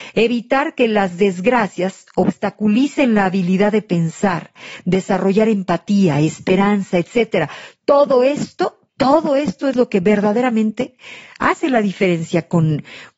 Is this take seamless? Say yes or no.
no